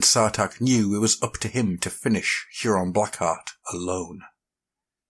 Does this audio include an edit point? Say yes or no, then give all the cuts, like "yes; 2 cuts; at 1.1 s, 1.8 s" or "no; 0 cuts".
yes; 1 cut; at 3.6 s